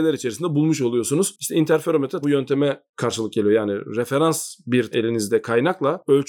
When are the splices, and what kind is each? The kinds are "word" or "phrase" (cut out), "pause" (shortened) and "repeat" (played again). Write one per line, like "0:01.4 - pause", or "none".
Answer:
0:02.2 - word
0:04.9 - word